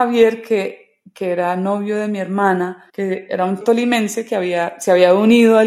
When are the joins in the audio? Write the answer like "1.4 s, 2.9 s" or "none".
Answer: 2.9 s, 3.6 s